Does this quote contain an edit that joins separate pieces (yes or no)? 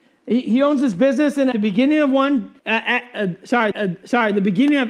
yes